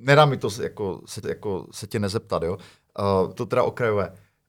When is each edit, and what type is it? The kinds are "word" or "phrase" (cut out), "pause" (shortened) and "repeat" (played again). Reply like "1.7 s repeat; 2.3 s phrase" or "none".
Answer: 1.2 s repeat; 3.4 s phrase